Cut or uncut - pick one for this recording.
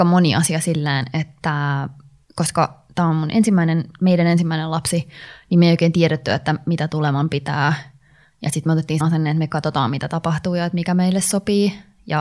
cut